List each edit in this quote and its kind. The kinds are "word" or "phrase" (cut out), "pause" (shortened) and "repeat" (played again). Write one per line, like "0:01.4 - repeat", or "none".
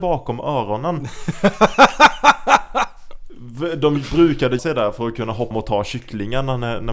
0:04.6 - word
0:05.5 - word